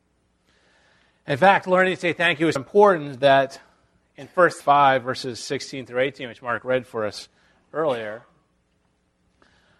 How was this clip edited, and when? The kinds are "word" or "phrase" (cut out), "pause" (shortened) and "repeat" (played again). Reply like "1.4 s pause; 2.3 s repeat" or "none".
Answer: 2.6 s word; 4.6 s word